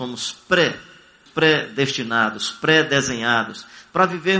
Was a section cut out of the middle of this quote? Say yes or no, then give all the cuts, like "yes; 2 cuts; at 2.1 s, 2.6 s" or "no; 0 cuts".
yes; 1 cut; at 1.3 s